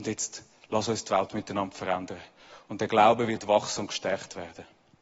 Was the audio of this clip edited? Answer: no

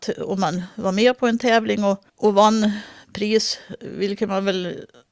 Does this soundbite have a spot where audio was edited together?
yes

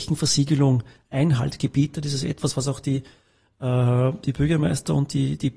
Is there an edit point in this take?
no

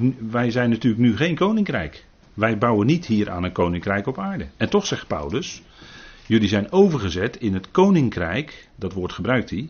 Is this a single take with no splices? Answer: no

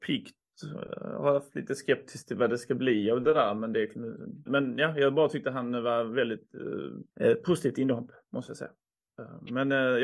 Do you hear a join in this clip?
yes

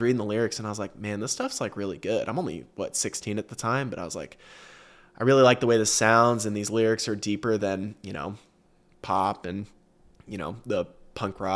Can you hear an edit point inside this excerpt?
no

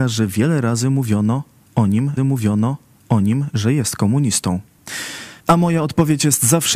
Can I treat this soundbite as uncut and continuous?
no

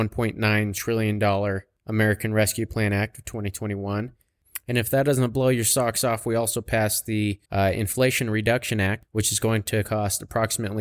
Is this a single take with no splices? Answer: no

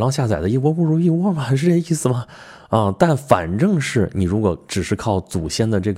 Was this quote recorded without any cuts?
yes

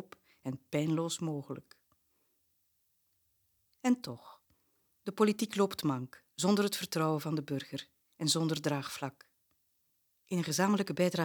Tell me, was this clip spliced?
no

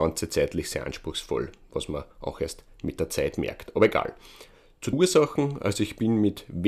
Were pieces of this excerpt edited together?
yes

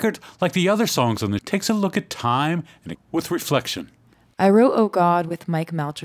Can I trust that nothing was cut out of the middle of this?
no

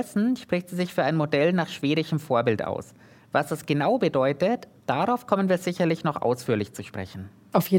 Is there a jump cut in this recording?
no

